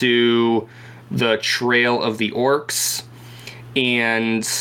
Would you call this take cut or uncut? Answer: uncut